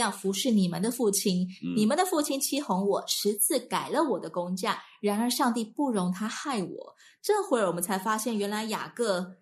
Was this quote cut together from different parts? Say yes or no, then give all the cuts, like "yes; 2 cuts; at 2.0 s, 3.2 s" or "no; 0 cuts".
no; 0 cuts